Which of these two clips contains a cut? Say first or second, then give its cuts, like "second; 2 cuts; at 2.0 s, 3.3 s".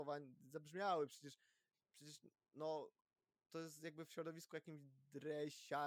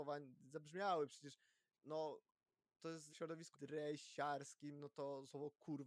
second; 3 cuts; at 1.7 s, 3.1 s, 3.5 s